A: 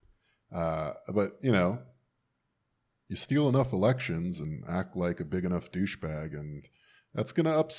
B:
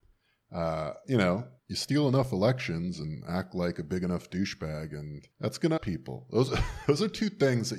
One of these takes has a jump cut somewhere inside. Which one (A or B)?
B